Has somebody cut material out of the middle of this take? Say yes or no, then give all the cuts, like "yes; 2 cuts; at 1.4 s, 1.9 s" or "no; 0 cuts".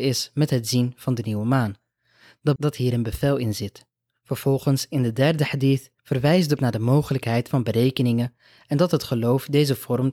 yes; 4 cuts; at 2.6 s, 6.0 s, 6.6 s, 7.5 s